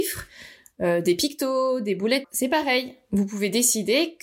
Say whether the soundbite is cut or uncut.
cut